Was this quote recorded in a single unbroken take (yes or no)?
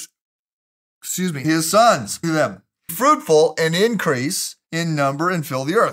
no